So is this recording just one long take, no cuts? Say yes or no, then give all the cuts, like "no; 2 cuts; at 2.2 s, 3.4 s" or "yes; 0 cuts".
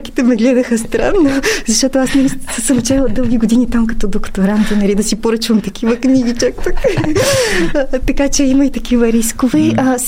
yes; 0 cuts